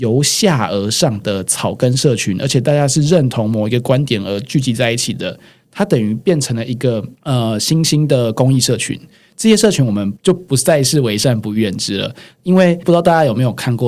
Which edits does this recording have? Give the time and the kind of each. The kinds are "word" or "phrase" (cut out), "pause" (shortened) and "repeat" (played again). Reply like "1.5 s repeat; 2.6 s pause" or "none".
none